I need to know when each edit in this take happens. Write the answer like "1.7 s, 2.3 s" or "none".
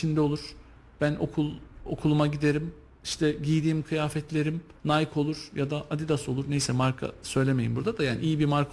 none